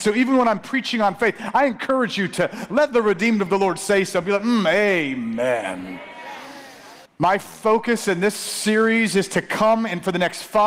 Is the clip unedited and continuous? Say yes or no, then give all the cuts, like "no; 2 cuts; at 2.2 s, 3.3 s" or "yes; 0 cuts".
no; 1 cut; at 7.0 s